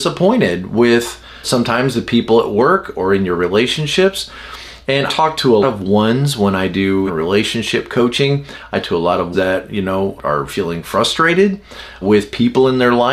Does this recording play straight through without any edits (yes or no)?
no